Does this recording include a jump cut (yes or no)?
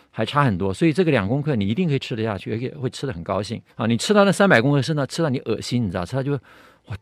yes